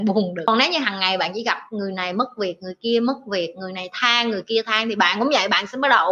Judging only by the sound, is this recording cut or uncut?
uncut